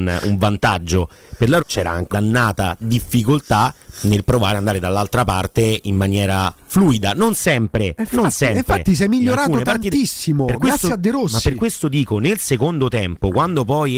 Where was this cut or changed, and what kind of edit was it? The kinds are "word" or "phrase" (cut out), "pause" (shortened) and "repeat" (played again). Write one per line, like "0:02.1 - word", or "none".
0:01.6 - word
0:02.1 - word